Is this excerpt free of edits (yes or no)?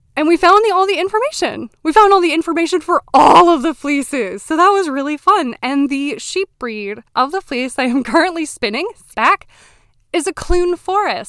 no